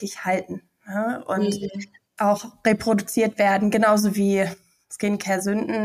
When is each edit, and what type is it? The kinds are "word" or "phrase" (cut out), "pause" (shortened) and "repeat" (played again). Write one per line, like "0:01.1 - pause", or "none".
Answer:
none